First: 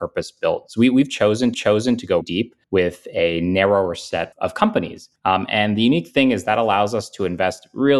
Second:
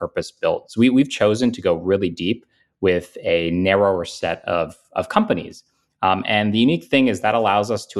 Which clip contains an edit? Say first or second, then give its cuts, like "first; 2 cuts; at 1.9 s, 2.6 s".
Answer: first; 5 cuts; at 1.5 s, 2.2 s, 2.6 s, 4.3 s, 5.2 s